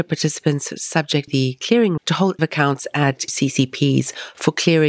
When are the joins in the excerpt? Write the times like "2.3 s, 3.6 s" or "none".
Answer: 1.3 s, 2.0 s, 2.4 s, 3.3 s